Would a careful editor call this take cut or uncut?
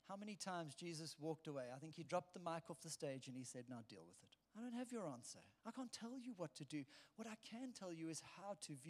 cut